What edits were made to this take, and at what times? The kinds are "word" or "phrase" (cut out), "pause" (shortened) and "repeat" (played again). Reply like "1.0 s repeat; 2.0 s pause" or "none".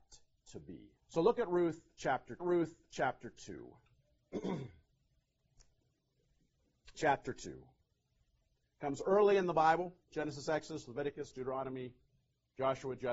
1.0 s pause; 2.4 s repeat; 6.9 s word; 11.3 s word